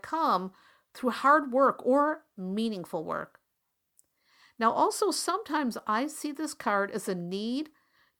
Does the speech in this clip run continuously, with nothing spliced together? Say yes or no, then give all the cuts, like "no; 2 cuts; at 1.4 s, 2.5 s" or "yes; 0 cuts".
yes; 0 cuts